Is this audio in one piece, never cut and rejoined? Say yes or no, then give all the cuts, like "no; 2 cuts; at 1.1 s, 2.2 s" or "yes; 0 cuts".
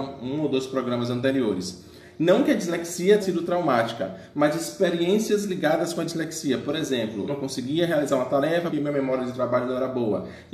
no; 3 cuts; at 3.2 s, 7.3 s, 8.7 s